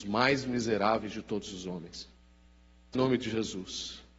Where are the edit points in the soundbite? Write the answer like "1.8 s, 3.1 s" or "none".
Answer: 2.9 s